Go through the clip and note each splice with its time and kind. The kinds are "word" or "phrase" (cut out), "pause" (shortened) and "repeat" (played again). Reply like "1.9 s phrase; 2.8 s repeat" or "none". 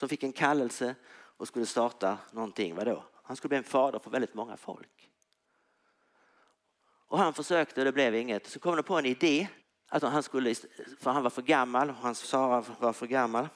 9.6 s pause; 12.2 s word